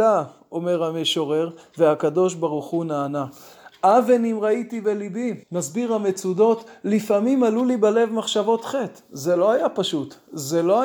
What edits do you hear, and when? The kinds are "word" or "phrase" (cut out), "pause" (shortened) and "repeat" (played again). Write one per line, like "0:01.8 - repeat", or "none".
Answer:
0:05.4 - pause